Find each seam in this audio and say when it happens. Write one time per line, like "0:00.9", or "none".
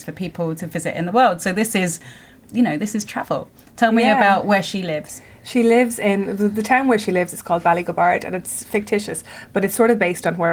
none